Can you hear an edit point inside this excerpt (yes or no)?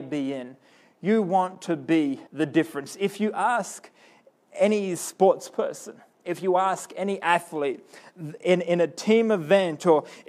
yes